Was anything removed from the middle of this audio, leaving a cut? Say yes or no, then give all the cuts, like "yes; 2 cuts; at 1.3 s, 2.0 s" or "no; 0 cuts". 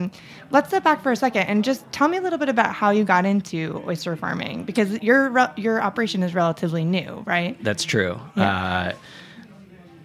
no; 0 cuts